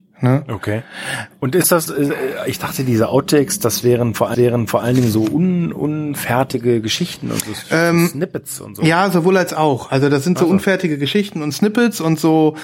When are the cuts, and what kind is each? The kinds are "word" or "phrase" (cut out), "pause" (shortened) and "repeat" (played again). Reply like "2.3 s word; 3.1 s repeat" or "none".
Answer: 4.3 s repeat